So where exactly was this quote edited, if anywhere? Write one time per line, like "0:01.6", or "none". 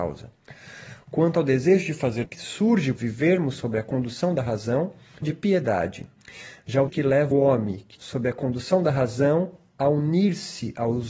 0:02.2
0:03.0
0:05.2
0:06.9
0:07.3
0:08.0